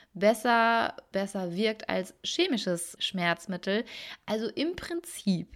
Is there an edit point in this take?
yes; 2 cuts; at 1.1 s, 3.0 s

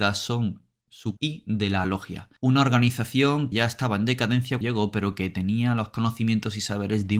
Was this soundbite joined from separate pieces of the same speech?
yes; 5 cuts; at 1.2 s, 1.8 s, 2.4 s, 3.5 s, 4.6 s

